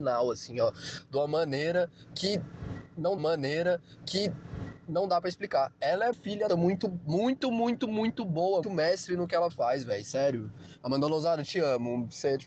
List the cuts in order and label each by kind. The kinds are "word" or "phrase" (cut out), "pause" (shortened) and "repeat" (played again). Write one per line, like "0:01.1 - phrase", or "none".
0:03.2 - repeat
0:06.1 - word
0:06.5 - phrase
0:08.6 - word